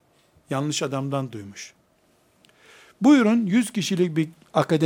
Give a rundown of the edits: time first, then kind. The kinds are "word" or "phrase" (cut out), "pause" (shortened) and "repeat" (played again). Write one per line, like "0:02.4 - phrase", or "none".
none